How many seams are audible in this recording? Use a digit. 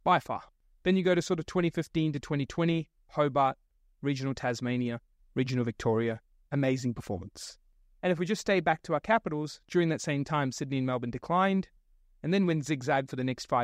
0